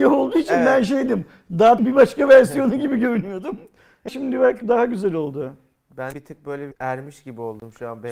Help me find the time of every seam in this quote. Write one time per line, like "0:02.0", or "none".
0:01.8
0:04.1
0:04.6
0:06.1
0:06.7